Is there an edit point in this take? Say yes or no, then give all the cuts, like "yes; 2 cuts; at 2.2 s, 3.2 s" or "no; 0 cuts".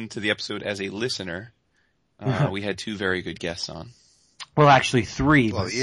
no; 0 cuts